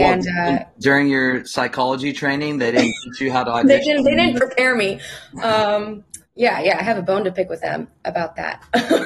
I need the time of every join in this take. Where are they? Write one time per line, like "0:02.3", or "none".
0:06.3